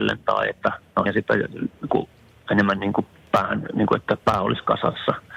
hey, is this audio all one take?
no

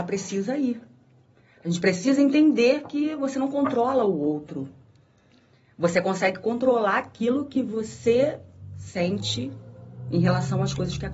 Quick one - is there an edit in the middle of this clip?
no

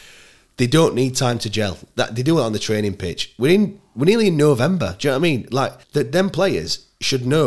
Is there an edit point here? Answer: yes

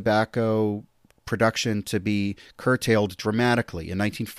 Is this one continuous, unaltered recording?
yes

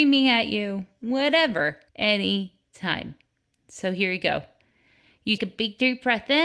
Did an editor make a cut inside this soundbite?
yes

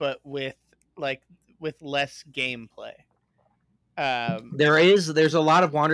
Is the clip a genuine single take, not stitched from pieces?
yes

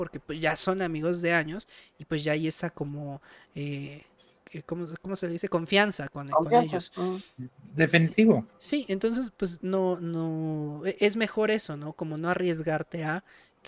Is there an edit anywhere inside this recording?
no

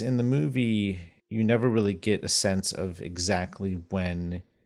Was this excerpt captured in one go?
no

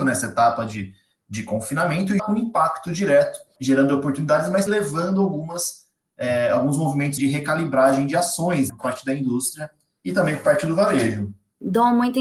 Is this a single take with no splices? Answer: no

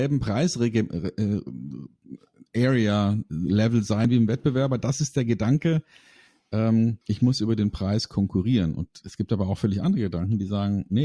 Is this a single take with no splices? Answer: no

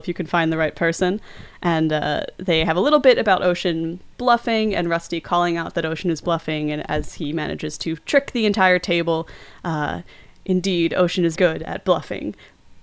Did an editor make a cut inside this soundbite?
yes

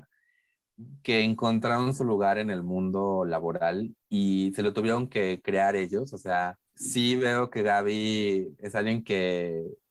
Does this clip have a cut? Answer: yes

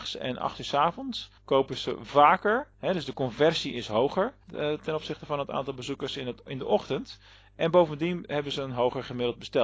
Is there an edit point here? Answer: yes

